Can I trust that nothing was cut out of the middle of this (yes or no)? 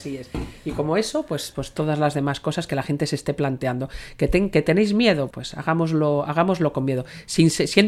no